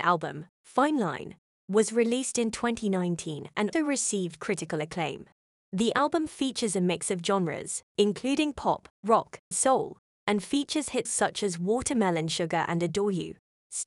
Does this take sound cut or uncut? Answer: cut